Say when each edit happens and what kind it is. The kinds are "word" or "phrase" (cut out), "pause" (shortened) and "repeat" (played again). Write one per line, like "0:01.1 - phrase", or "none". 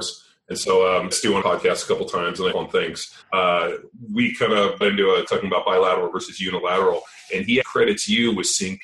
0:01.1 - phrase
0:01.4 - phrase
0:02.5 - phrase
0:03.2 - pause
0:04.8 - word
0:05.3 - word
0:07.6 - word